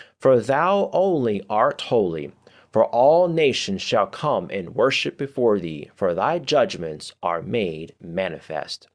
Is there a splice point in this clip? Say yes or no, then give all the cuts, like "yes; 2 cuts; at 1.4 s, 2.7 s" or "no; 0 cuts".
no; 0 cuts